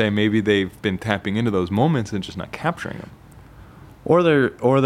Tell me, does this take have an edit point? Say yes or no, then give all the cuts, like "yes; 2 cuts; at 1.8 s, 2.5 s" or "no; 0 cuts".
no; 0 cuts